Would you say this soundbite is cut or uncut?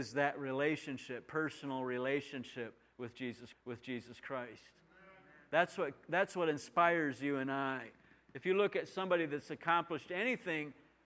cut